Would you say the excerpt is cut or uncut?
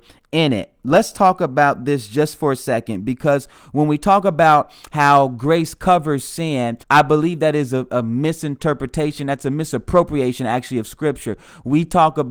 cut